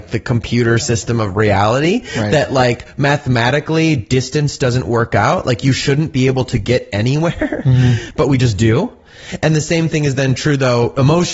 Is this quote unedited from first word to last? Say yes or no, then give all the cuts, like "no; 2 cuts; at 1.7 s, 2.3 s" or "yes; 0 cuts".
yes; 0 cuts